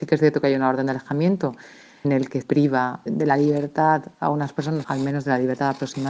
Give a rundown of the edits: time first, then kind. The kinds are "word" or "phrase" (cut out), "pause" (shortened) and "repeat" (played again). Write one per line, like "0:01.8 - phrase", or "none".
0:02.0 - word
0:02.4 - word
0:03.1 - word
0:04.8 - word